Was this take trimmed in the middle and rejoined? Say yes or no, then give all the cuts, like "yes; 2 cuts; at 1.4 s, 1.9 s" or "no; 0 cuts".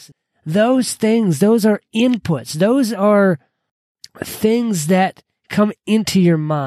no; 0 cuts